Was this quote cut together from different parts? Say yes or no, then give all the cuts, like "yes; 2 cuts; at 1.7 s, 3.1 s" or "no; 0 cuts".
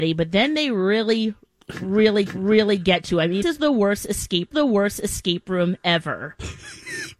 yes; 3 cuts; at 2.3 s, 3.4 s, 4.5 s